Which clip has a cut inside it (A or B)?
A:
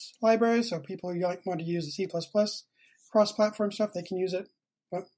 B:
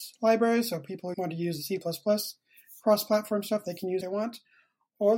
B